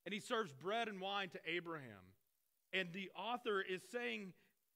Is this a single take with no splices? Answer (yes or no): yes